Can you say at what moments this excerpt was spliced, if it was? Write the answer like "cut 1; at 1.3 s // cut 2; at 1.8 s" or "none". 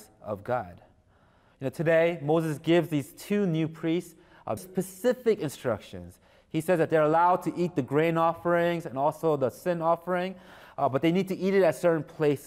cut 1; at 4.6 s